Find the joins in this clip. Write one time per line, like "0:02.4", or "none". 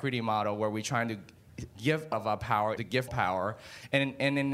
0:01.7
0:02.1
0:02.8
0:03.1